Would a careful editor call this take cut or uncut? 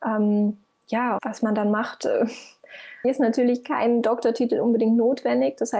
cut